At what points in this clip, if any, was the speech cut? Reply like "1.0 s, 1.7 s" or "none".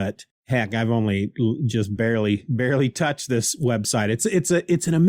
none